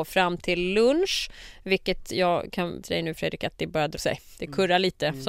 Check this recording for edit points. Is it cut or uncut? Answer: cut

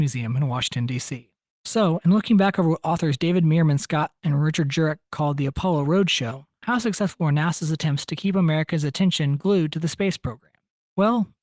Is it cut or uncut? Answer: uncut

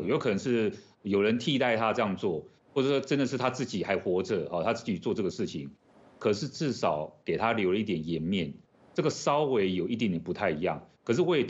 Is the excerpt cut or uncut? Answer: uncut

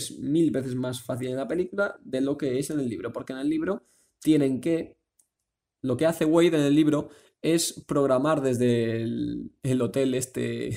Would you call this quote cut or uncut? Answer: uncut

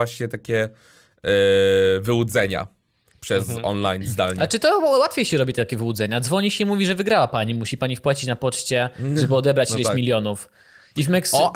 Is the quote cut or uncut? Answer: uncut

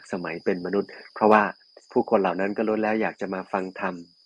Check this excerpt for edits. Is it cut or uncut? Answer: cut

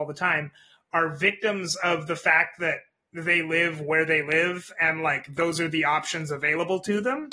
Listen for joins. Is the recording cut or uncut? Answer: uncut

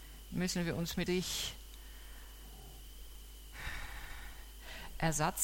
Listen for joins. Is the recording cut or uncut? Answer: cut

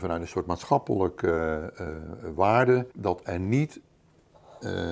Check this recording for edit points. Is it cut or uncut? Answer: cut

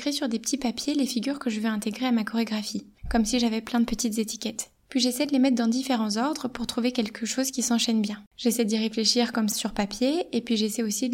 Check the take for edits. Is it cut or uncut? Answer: cut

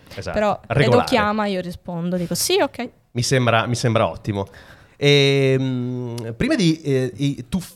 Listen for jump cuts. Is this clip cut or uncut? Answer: uncut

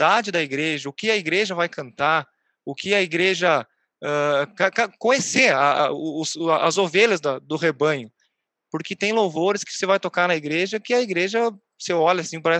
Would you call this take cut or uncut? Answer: uncut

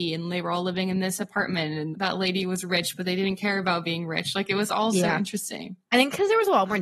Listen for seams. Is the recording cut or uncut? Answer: cut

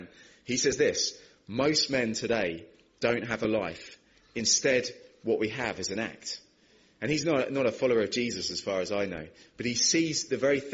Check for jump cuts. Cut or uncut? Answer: uncut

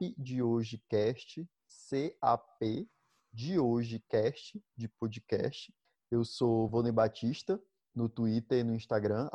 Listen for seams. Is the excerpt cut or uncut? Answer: uncut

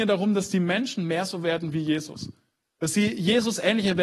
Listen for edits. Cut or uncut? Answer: uncut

